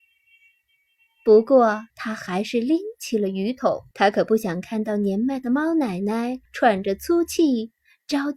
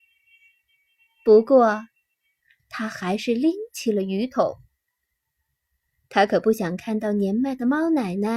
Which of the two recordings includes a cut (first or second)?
first